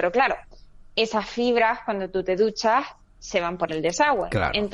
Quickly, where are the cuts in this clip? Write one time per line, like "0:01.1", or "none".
none